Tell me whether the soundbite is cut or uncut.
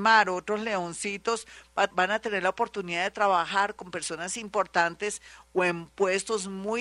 cut